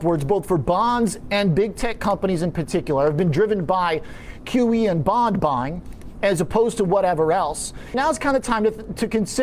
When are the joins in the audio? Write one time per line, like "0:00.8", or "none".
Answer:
0:07.9